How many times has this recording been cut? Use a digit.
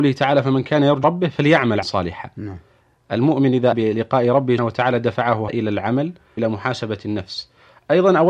6